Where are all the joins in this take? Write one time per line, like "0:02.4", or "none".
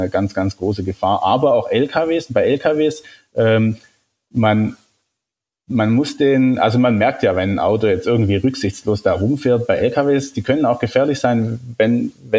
none